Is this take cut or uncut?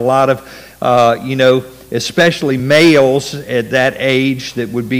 uncut